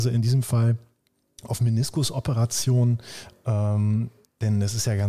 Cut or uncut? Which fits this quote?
uncut